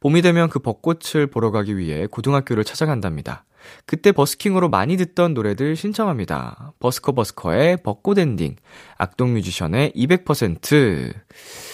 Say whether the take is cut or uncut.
uncut